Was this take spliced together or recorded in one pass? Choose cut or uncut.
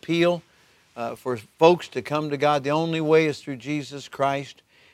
uncut